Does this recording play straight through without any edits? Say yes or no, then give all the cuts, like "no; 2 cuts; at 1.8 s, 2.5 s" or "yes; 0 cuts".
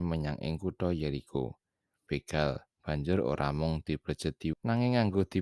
no; 3 cuts; at 2.1 s, 2.7 s, 4.5 s